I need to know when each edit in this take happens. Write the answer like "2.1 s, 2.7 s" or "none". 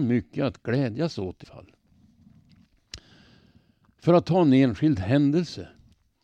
1.4 s

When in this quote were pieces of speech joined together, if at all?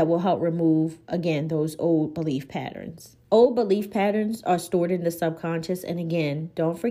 3.2 s

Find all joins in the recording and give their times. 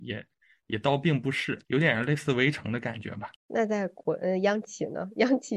1.6 s, 3.4 s

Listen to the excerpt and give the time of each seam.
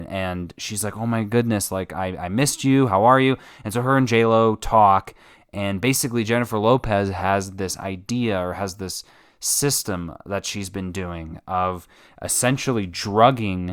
none

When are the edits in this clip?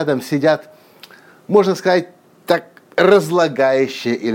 none

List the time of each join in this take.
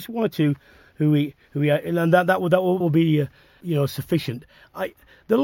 2.8 s, 3.6 s

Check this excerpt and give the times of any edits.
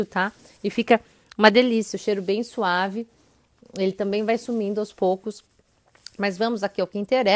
none

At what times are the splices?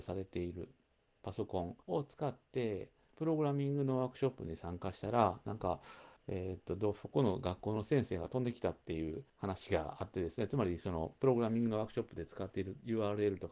1.8 s, 6.2 s, 9.3 s

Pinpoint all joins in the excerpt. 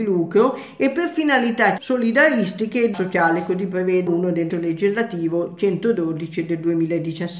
1.8 s, 2.9 s, 4.1 s, 4.5 s

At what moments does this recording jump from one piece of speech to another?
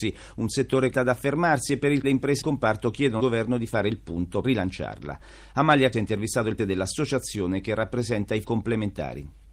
0.9 s, 2.0 s, 2.4 s, 3.2 s, 4.4 s, 5.9 s, 6.6 s, 8.4 s

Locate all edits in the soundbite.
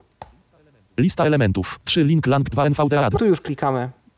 2.5 s, 3.2 s

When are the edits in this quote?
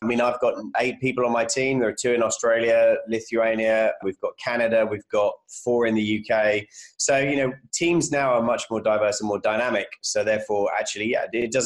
4.0 s

